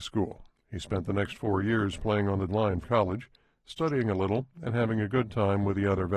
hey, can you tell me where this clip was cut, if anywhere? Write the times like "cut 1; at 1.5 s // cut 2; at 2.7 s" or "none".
cut 1; at 2.5 s // cut 2; at 2.8 s